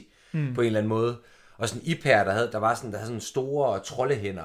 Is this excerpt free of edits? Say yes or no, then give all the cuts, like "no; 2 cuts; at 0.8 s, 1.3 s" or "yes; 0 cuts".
yes; 0 cuts